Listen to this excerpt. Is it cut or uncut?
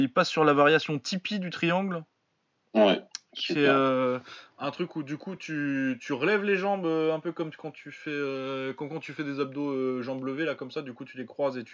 uncut